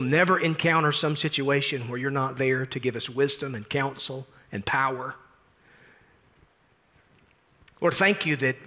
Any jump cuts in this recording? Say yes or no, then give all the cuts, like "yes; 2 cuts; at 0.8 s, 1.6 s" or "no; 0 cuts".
no; 0 cuts